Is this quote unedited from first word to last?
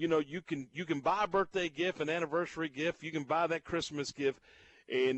yes; 0 cuts

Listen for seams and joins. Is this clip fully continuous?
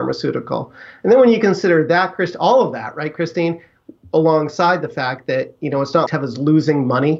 no; 1 cut; at 6.1 s

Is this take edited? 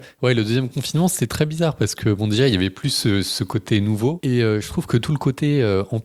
no; 0 cuts

